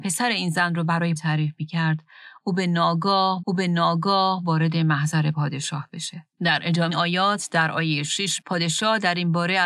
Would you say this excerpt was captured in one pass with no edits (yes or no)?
no